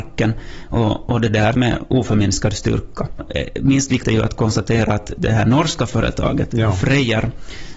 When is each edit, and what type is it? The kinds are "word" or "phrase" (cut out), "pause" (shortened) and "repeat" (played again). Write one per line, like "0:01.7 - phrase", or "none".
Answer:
0:01.5 - phrase
0:04.0 - word